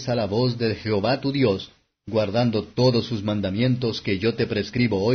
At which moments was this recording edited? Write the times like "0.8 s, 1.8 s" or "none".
none